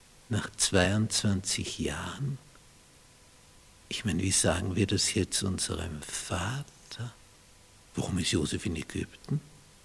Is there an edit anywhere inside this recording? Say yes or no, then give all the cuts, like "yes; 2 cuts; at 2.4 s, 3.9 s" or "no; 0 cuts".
no; 0 cuts